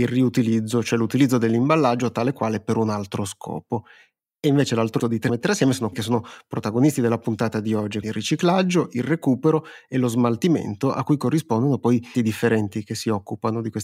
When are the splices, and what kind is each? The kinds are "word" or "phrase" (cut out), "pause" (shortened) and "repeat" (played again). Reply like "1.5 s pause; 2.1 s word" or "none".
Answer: 5.0 s word; 5.3 s phrase; 5.9 s word; 8.0 s word; 12.1 s word